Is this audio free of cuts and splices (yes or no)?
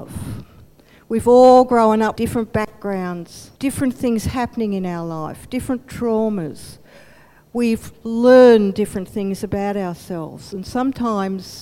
no